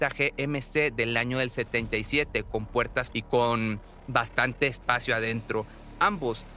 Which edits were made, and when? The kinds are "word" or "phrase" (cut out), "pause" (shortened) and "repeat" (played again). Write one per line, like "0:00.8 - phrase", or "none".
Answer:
0:03.1 - word